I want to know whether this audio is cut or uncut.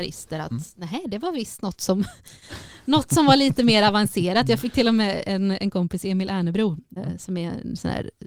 cut